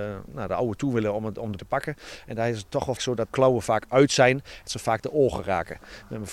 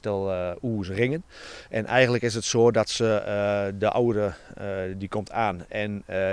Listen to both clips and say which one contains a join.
first; 4 cuts; at 1.6 s, 3.0 s, 3.3 s, 4.7 s

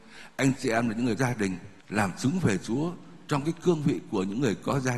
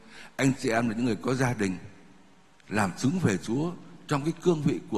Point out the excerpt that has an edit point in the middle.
first; 2 cuts; at 1.2 s, 1.8 s

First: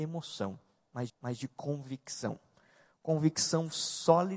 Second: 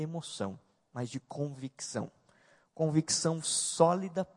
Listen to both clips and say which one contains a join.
first; 1 cut; at 1.1 s

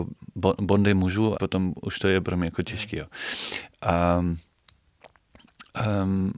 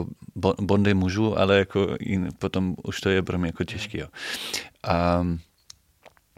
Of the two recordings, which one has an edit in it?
first; 1 cut; at 1.3 s

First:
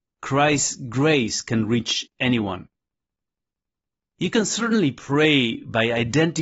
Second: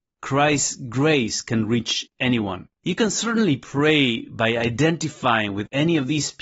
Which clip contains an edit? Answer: second; 1 cut; at 2.7 s

